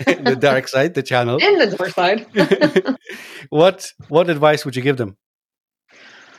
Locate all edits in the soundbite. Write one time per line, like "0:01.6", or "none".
none